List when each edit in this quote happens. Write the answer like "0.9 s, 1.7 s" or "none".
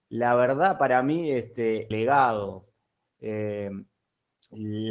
1.9 s